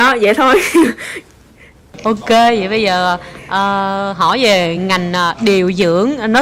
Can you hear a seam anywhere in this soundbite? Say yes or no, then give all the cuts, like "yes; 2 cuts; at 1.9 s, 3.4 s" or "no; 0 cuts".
no; 0 cuts